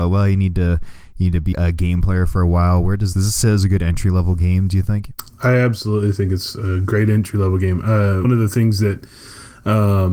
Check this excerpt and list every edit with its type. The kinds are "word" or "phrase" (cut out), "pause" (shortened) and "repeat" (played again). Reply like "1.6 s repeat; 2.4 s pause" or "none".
1.5 s word; 3.1 s word; 8.2 s word